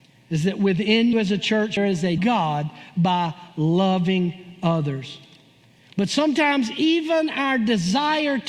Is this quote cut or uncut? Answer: cut